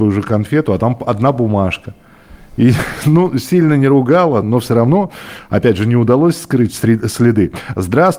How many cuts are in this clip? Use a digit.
1